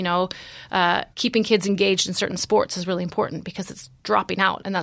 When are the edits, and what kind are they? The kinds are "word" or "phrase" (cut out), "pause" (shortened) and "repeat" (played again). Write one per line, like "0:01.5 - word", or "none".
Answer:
0:01.1 - pause